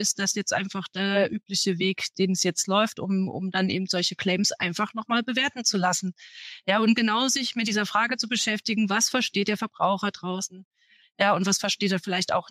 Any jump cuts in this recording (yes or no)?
no